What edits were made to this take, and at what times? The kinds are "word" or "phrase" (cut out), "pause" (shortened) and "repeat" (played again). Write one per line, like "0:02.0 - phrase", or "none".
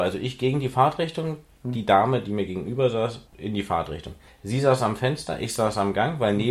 0:03.3 - pause
0:04.3 - pause